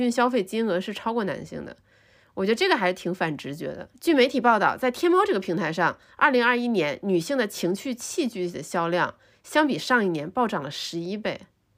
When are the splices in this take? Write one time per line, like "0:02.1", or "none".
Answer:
none